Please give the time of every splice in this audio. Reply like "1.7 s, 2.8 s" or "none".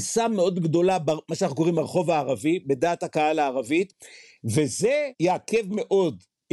none